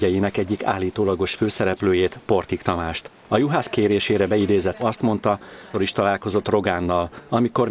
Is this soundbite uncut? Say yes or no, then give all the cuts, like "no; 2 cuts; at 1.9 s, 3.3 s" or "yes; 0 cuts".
no; 3 cuts; at 3.7 s, 4.8 s, 5.7 s